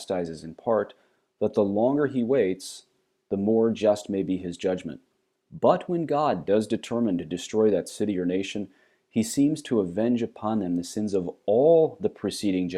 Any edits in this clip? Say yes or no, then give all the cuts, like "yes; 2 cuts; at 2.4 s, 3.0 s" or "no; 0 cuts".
no; 0 cuts